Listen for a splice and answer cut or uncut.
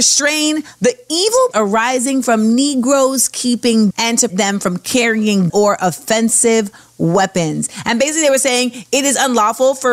cut